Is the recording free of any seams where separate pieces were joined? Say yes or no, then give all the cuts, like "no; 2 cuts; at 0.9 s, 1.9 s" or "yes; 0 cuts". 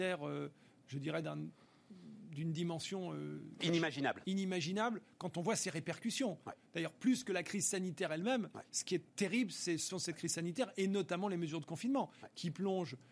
no; 2 cuts; at 9.1 s, 9.9 s